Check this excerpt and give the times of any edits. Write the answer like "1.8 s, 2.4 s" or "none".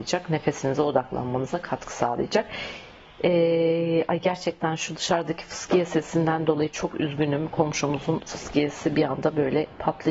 none